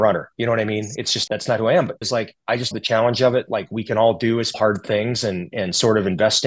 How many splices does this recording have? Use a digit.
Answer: 6